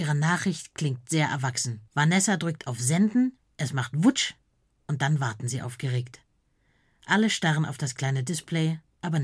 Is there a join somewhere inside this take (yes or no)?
yes